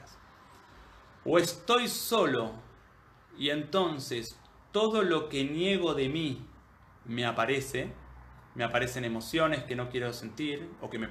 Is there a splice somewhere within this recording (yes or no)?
no